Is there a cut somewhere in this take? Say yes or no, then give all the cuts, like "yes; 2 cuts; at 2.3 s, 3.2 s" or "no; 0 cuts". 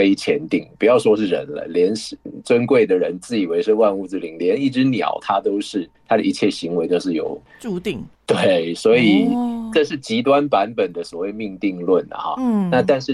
yes; 3 cuts; at 5.9 s, 7.5 s, 8.1 s